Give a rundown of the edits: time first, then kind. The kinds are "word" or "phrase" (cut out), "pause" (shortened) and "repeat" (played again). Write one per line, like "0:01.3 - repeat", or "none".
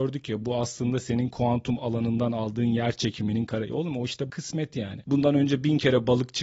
0:04.3 - word